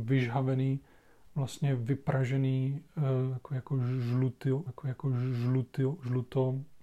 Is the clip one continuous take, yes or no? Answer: no